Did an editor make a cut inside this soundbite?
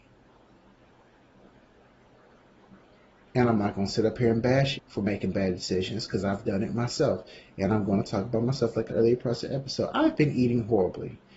yes; 2 cuts; at 4.7 s, 8.9 s

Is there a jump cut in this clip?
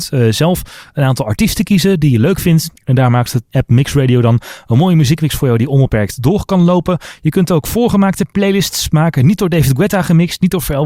yes; 1 cut; at 2.8 s

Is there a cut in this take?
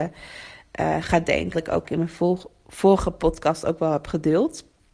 yes; 2 cuts; at 1.5 s, 1.8 s

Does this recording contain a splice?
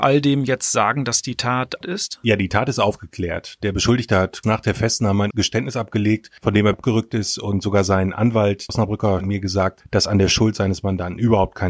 yes; 6 cuts; at 1.8 s, 4.4 s, 5.3 s, 6.7 s, 8.7 s, 9.2 s

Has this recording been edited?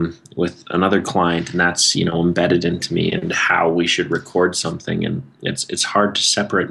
no; 0 cuts

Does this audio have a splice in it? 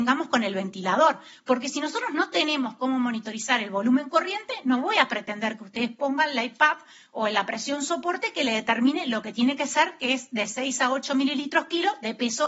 no; 0 cuts

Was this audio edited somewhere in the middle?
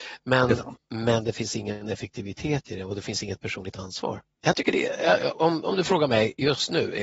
no; 0 cuts

